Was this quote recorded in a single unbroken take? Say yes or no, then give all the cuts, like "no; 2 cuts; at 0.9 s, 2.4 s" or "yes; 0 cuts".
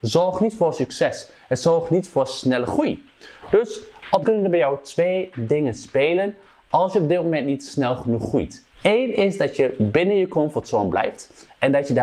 no; 2 cuts; at 4.2 s, 8.7 s